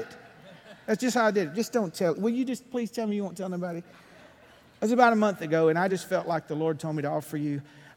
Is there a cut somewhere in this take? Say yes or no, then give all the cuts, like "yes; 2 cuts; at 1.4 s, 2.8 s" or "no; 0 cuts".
no; 0 cuts